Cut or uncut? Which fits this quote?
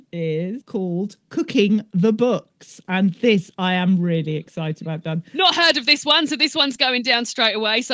uncut